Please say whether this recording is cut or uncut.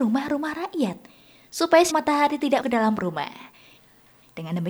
cut